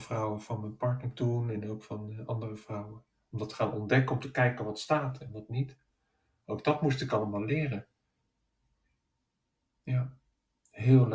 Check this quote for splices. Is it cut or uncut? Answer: uncut